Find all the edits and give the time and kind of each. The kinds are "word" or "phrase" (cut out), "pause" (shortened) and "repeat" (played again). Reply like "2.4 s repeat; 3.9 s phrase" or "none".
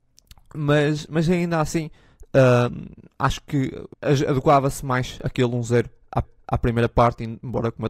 3.9 s pause; 6.2 s repeat